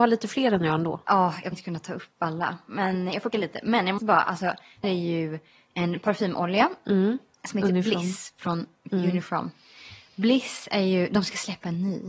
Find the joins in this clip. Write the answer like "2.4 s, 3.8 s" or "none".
1.5 s, 3.3 s, 4.0 s, 4.8 s, 8.9 s